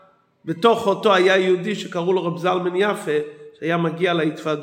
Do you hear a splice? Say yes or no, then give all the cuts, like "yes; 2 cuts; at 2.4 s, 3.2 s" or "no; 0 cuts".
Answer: no; 0 cuts